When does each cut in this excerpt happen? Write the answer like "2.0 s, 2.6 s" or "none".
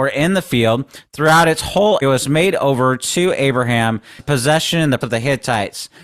2.0 s, 4.2 s, 5.0 s